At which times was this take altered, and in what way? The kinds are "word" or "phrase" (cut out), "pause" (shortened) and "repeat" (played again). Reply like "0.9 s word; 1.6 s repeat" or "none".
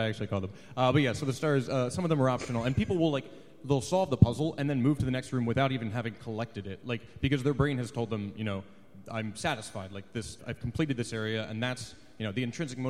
10.4 s word